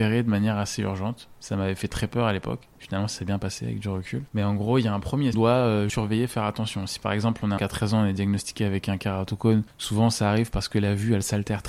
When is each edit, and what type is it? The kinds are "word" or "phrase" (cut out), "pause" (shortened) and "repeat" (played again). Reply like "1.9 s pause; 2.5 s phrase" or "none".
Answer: 4.3 s pause; 5.3 s phrase; 5.9 s word; 7.6 s phrase